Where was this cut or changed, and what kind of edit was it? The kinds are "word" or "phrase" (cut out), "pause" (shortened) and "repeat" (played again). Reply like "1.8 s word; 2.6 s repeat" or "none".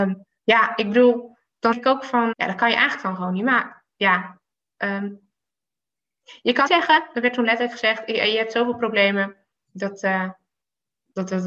1.7 s word; 2.3 s word; 6.7 s word

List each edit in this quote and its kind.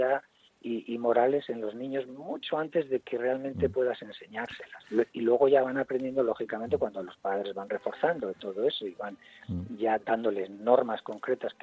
none

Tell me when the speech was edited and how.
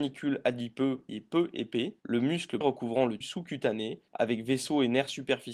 1.1 s word; 2.0 s pause; 2.6 s word; 3.2 s word; 4.1 s pause

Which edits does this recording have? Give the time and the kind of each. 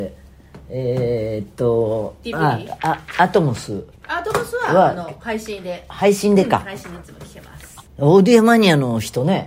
4.0 s pause; 7.9 s pause

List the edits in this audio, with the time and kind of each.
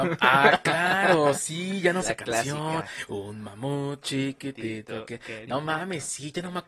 2.0 s phrase

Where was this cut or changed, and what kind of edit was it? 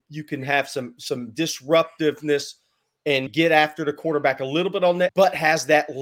3.3 s word; 5.1 s word

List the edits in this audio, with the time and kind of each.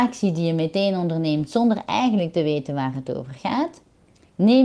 none

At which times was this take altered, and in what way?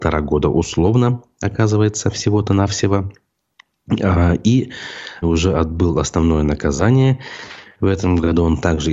5.2 s word

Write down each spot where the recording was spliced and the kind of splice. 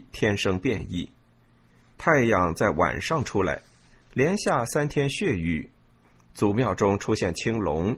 none

